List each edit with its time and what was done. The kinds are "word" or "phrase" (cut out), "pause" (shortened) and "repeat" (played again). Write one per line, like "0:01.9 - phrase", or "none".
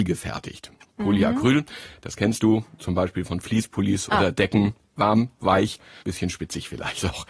0:06.0 - pause